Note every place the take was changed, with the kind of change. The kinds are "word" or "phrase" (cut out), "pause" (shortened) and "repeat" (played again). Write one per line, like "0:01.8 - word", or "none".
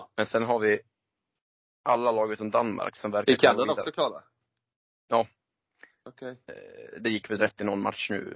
none